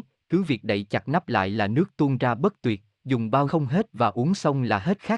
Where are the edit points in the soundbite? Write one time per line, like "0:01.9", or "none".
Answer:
0:03.5